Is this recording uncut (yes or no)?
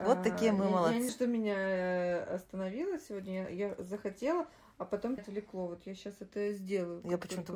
no